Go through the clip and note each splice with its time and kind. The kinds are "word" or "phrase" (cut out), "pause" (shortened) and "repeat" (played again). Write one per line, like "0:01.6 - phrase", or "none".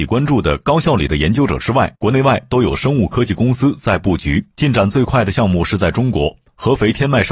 0:01.9 - pause
0:04.5 - pause